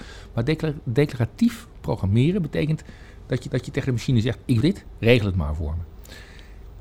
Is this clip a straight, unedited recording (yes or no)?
no